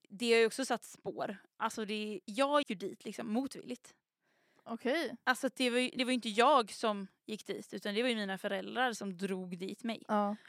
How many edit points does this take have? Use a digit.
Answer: 3